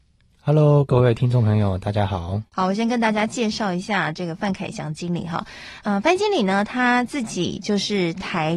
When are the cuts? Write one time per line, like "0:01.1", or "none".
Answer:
0:02.5